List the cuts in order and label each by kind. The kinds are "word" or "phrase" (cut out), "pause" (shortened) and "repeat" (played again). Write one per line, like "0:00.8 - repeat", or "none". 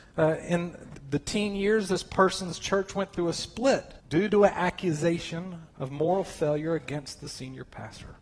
0:04.0 - pause
0:05.7 - pause